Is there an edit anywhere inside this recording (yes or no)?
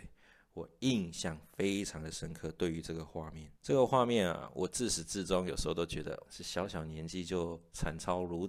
yes